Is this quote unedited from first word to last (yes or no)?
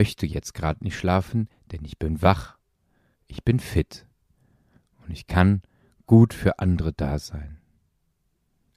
yes